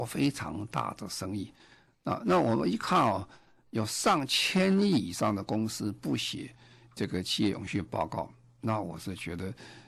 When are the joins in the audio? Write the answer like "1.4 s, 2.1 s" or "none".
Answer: none